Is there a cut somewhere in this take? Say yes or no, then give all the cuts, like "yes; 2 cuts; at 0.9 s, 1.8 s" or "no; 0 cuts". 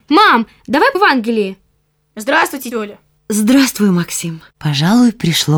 yes; 3 cuts; at 0.9 s, 2.7 s, 4.5 s